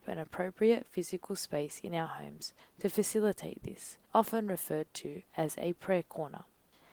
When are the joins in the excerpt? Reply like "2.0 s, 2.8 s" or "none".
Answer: 4.0 s, 5.3 s